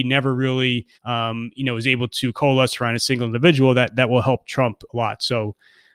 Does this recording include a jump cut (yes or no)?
yes